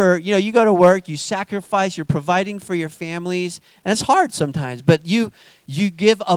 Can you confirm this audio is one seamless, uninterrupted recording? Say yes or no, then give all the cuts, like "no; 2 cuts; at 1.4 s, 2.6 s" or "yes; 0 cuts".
yes; 0 cuts